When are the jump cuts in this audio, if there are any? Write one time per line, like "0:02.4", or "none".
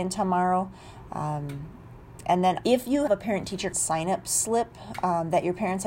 0:02.6
0:03.1
0:03.7